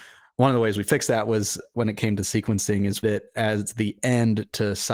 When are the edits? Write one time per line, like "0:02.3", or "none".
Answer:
0:03.0